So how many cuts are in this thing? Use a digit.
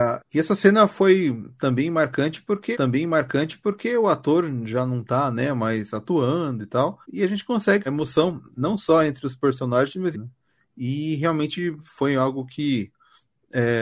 4